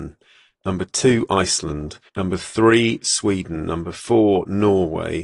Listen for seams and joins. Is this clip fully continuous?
no; 1 cut; at 2.1 s

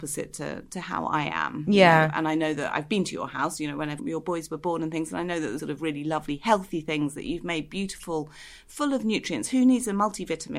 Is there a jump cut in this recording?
yes; 2 cuts; at 4.0 s, 5.6 s

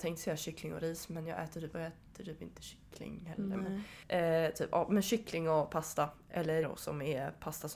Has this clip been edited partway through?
yes; 3 cuts; at 1.7 s, 4.0 s, 6.6 s

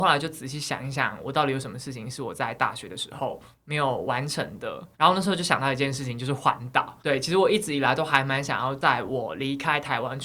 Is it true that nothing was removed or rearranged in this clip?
no; 2 cuts; at 4.9 s, 7.0 s

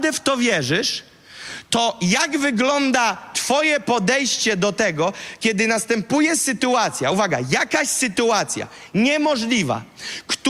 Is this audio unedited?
yes; 0 cuts

